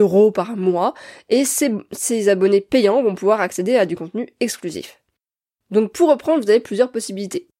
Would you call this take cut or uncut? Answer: uncut